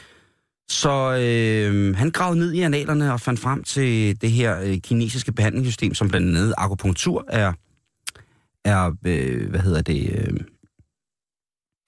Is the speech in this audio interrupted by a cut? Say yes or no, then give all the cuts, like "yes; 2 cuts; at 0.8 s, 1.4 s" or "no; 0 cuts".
no; 0 cuts